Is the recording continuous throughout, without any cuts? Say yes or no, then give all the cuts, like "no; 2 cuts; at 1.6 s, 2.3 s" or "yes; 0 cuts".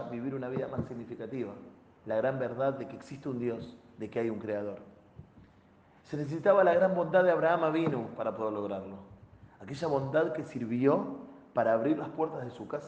yes; 0 cuts